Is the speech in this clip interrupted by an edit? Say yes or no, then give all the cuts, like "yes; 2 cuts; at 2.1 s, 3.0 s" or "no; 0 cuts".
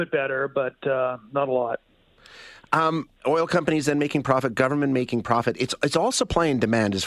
yes; 1 cut; at 3.2 s